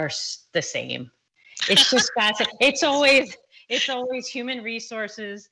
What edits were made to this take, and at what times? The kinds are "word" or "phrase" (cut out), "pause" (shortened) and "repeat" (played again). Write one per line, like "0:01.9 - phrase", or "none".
none